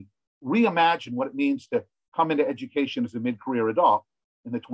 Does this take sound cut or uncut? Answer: uncut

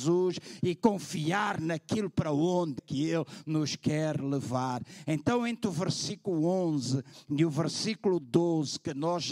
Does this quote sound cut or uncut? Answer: cut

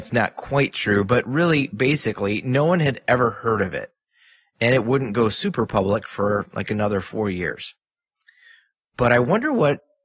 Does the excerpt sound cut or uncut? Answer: uncut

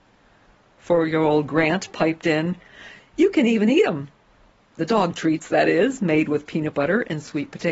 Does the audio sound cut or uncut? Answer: uncut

